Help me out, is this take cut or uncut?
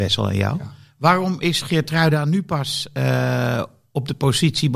uncut